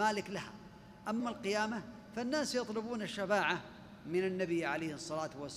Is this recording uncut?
no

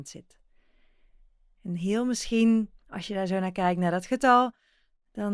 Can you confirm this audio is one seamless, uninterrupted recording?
no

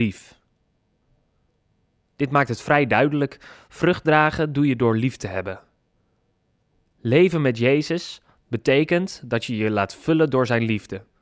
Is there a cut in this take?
no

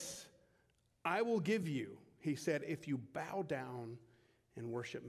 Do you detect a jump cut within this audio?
no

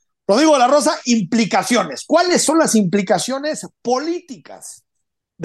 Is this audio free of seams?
yes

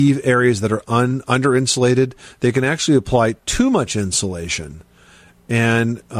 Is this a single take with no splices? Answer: yes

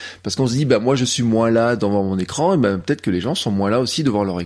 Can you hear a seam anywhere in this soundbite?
no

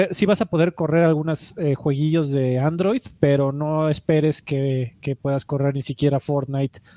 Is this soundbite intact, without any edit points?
yes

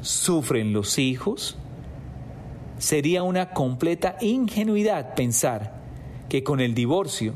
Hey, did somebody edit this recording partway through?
no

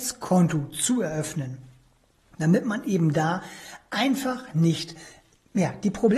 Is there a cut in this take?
no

